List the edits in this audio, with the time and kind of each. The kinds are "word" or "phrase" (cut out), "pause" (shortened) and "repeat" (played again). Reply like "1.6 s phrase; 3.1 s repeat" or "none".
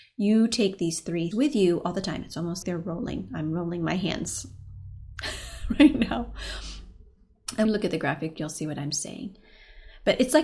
1.3 s word; 2.6 s word; 7.7 s word